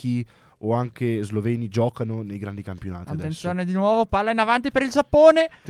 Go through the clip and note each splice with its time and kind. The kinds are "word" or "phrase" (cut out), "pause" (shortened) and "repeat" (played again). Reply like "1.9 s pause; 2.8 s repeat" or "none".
none

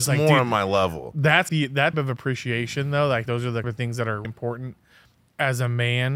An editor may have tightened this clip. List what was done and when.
1.5 s word; 1.9 s word; 3.3 s word; 3.6 s word; 4.2 s word

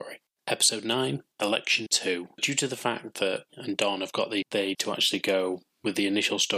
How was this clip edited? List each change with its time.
1.9 s word; 2.4 s word; 3.5 s word; 4.4 s word; 4.7 s word

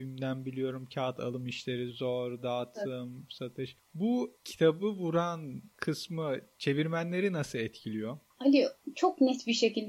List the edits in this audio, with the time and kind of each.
none

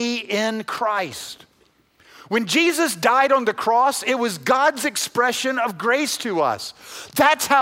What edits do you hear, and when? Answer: none

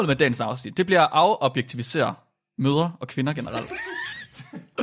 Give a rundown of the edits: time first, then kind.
none

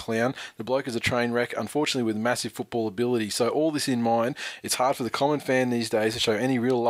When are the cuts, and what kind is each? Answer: none

